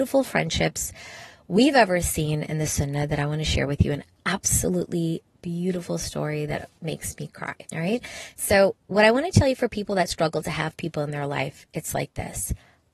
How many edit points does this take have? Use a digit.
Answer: 2